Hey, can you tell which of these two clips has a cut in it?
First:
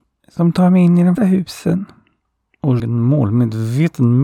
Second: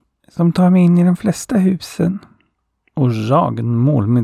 first; 2 cuts; at 1.2 s, 2.8 s

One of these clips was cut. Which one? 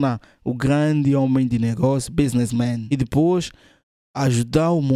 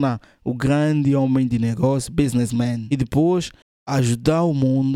second; 1 cut; at 3.6 s

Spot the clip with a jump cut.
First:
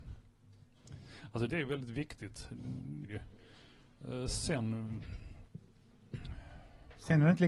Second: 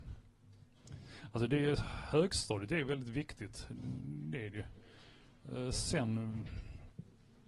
first; 2 cuts; at 1.5 s, 3.0 s

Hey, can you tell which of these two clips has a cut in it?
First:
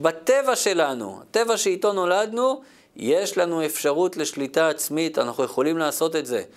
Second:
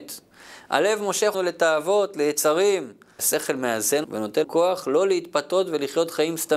second; 4 cuts; at 1.3 s, 3.2 s, 4.0 s, 4.4 s

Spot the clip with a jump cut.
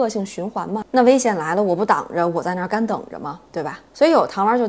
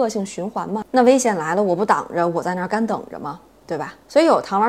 first; 1 cut; at 3.4 s

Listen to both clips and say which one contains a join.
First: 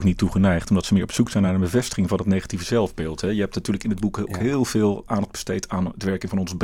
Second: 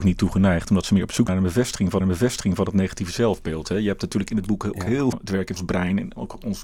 second; 4 cuts; at 1.3 s, 2.0 s, 5.1 s, 5.6 s

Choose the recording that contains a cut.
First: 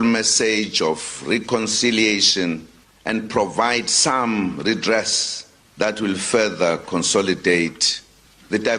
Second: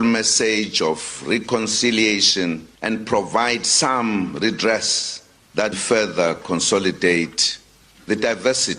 second; 2 cuts; at 2.8 s, 5.7 s

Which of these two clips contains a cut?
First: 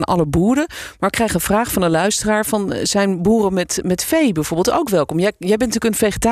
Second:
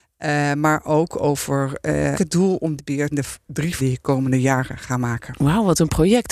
second; 4 cuts; at 2.1 s, 2.8 s, 3.1 s, 3.8 s

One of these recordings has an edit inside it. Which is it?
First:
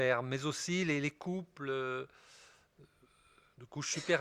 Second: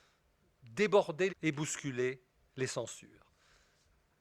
second; 1 cut; at 1.3 s

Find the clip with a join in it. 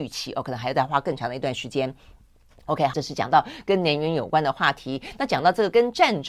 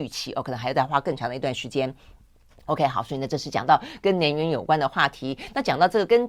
first; 1 cut; at 2.9 s

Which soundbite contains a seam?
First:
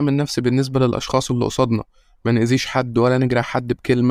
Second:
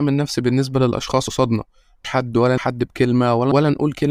second; 3 cuts; at 1.3 s, 2.0 s, 2.6 s

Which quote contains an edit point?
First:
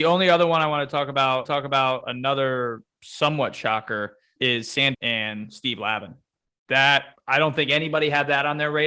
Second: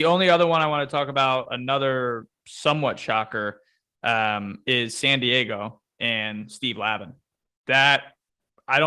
first; 4 cuts; at 1.5 s, 4.4 s, 4.9 s, 7.2 s

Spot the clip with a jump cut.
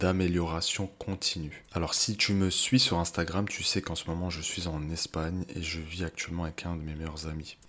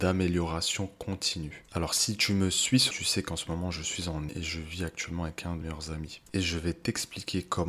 second; 3 cuts; at 2.9 s, 4.3 s, 5.6 s

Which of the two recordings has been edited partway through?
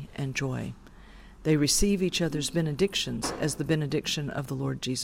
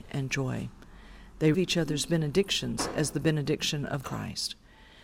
second; 2 cuts; at 1.5 s, 4.0 s

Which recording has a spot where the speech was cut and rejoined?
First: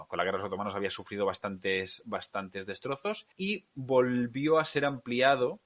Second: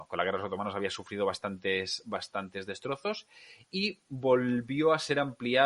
first; 1 cut; at 3.3 s

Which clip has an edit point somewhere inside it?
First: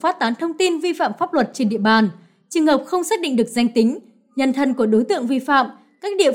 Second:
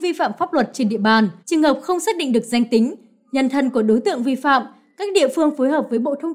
second; 1 cut; at 1.4 s

